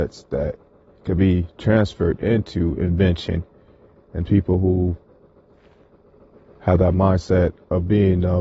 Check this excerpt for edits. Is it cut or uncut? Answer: uncut